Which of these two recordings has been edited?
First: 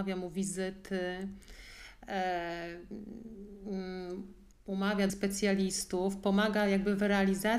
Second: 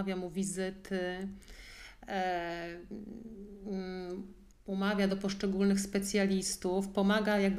first; 1 cut; at 5.1 s

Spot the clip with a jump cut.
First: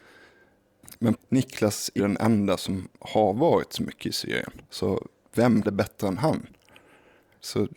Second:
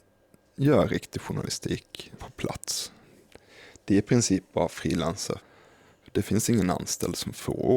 first; 4 cuts; at 2.0 s, 2.9 s, 4.7 s, 5.6 s

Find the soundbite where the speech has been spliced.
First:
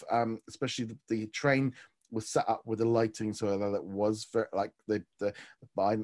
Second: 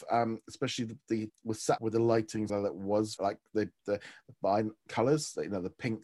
second; 5 cuts; at 1.3 s, 1.8 s, 2.5 s, 3.2 s, 4.9 s

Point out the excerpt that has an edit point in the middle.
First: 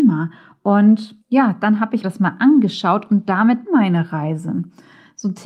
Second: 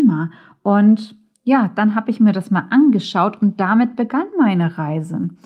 first; 3 cuts; at 1.2 s, 2.0 s, 3.6 s

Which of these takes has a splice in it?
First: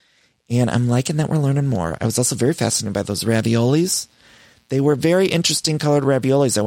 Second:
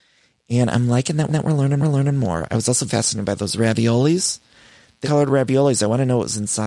second; 4 cuts; at 1.3 s, 1.8 s, 2.9 s, 5.0 s

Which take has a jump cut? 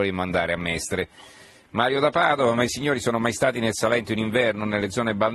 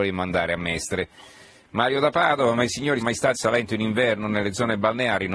second; 2 cuts; at 3.0 s, 3.3 s

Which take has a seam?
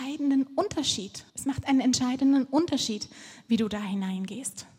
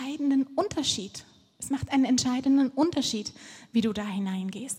first; 1 cut; at 1.3 s

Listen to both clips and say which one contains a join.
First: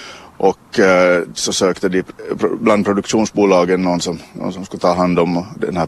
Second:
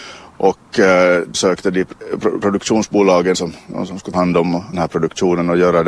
second; 5 cuts; at 1.3 s, 2.4 s, 3.3 s, 4.1 s, 4.7 s

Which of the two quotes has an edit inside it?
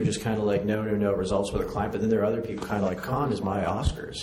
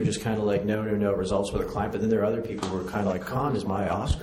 first; 1 cut; at 2.6 s

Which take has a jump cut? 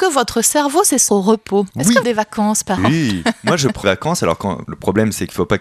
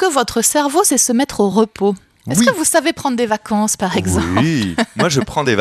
first; 6 cuts; at 1.1 s, 1.7 s, 2.0 s, 2.8 s, 3.8 s, 4.6 s

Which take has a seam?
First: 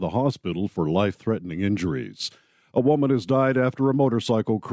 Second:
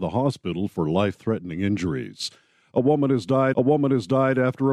second; 1 cut; at 3.5 s

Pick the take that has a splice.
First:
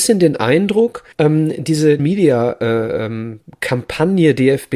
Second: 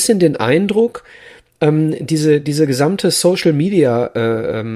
first; 2 cuts; at 1.1 s, 2.0 s

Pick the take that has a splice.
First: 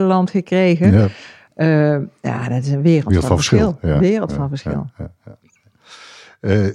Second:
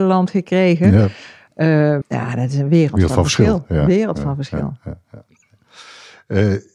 second; 1 cut; at 2.0 s

